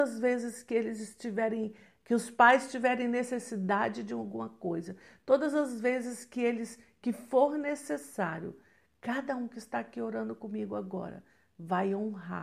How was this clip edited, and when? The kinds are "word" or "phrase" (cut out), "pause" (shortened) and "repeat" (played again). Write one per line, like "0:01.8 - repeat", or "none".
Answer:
none